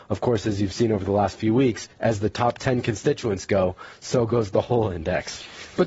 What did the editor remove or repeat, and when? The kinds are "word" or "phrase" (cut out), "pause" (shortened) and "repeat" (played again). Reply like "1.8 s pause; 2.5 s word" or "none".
1.9 s pause